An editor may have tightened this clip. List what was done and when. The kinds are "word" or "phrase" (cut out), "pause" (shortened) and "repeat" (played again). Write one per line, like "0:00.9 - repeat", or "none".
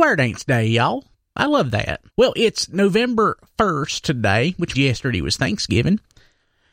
0:01.1 - pause
0:02.1 - pause
0:04.7 - word